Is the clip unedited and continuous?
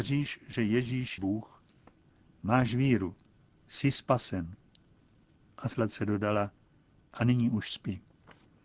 no; 1 cut; at 1.2 s

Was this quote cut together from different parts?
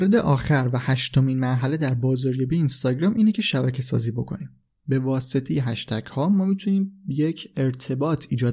no; 0 cuts

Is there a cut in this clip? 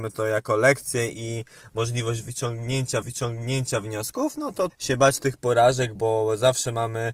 yes; 3 cuts; at 3.0 s, 4.7 s, 6.0 s

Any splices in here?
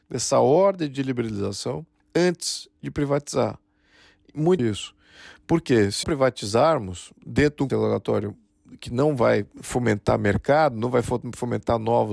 yes; 5 cuts; at 2.0 s, 4.6 s, 6.0 s, 7.2 s, 7.7 s

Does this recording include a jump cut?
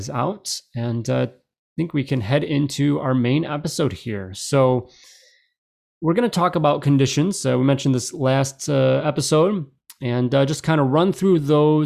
no; 0 cuts

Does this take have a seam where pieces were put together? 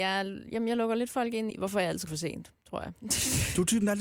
yes; 2 cuts; at 1.5 s, 2.1 s

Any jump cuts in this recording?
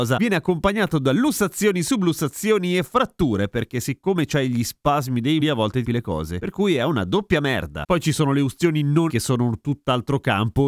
yes; 3 cuts; at 5.4 s, 5.8 s, 9.1 s

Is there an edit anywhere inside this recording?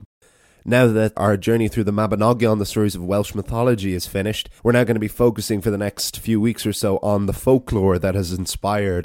yes; 2 cuts; at 1.2 s, 4.6 s

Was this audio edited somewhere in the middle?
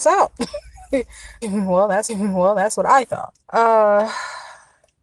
yes; 3 cuts; at 1.4 s, 2.1 s, 3.4 s

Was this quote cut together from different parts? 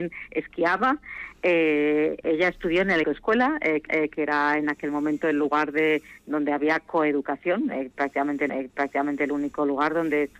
yes; 3 cuts; at 3.0 s, 3.9 s, 8.5 s

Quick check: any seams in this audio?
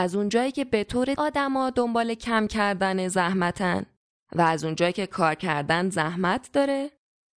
yes; 1 cut; at 1.2 s

